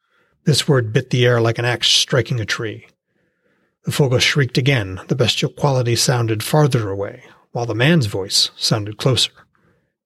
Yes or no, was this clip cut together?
no